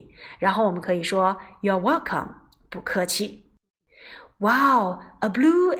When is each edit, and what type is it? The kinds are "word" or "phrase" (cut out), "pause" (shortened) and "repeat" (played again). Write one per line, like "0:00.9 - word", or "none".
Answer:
none

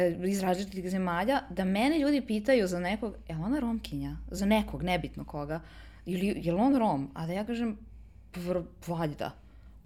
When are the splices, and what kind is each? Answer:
none

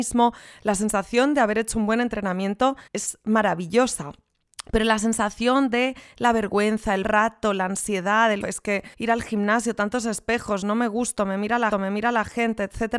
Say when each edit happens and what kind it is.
0:02.9 - pause
0:07.0 - word
0:08.4 - word
0:08.9 - pause
0:11.7 - repeat

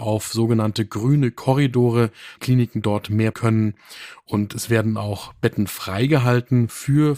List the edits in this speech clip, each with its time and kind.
0:02.4 - phrase
0:03.3 - phrase

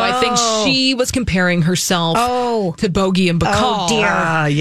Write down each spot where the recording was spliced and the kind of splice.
none

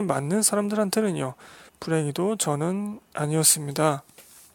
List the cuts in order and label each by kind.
none

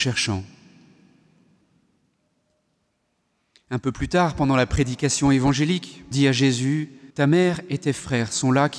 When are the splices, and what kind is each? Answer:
0:06.1 - word
0:07.1 - pause

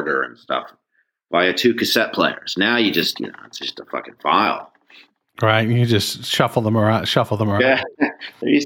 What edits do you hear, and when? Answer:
none

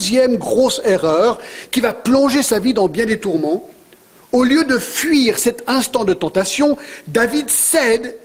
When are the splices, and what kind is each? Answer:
none

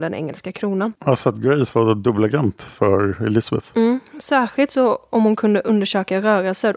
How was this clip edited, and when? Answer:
0:01.0 - pause

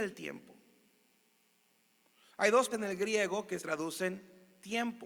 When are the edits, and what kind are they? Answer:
0:02.7 - word
0:03.6 - word

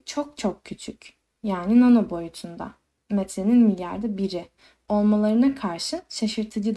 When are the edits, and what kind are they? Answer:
none

